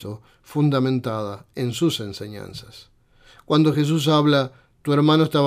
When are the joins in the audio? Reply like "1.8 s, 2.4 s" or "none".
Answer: none